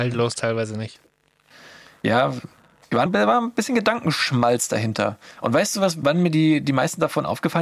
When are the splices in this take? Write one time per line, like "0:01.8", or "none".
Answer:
0:03.1
0:06.0